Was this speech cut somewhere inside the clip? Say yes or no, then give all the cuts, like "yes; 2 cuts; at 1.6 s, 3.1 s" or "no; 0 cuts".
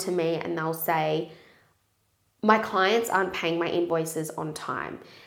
no; 0 cuts